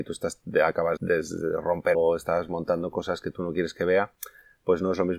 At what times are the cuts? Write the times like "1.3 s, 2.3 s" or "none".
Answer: 1.0 s, 1.9 s

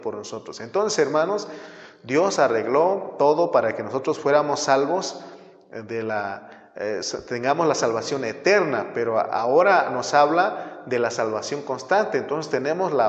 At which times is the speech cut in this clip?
none

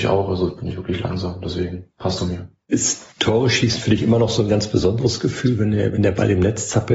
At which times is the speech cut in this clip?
2.2 s, 3.1 s

